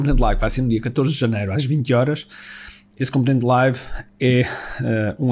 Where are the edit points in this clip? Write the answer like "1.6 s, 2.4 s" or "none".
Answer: none

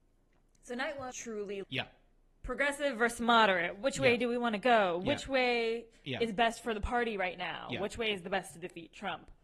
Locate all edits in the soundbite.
1.1 s, 1.6 s

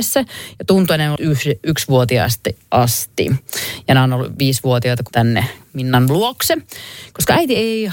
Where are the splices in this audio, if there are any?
1.2 s, 5.1 s

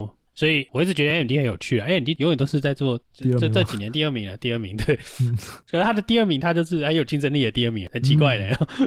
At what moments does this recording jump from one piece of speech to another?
none

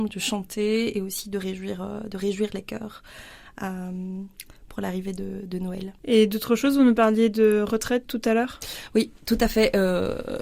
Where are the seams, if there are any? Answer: 6.0 s

